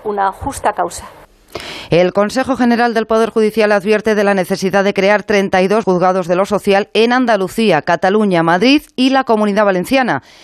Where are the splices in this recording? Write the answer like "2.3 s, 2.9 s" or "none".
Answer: 5.8 s